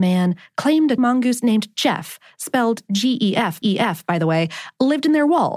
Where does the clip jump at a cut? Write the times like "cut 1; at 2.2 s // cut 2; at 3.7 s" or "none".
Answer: cut 1; at 1.0 s // cut 2; at 3.6 s